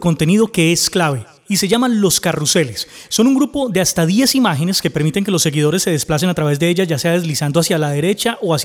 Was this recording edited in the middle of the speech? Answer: no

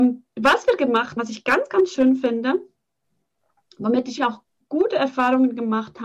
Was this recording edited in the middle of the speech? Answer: yes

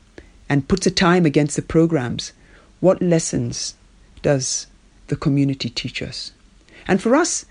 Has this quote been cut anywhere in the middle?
no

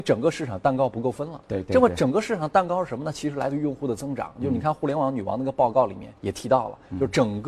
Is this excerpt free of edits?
no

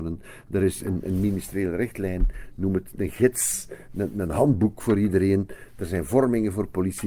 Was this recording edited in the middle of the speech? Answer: no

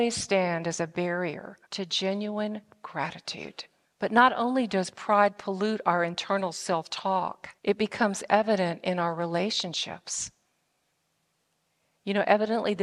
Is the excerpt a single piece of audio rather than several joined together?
no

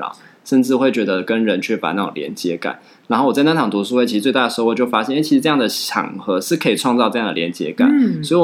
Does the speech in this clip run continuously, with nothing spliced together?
yes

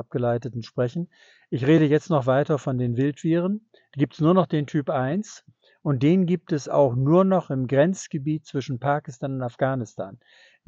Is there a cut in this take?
no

